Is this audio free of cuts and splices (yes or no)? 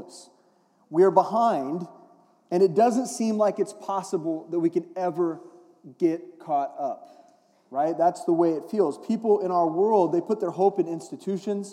yes